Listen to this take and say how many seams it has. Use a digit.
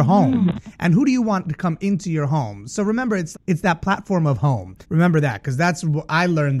2